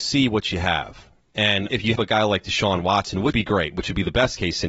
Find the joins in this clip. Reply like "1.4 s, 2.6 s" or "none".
2.0 s, 3.3 s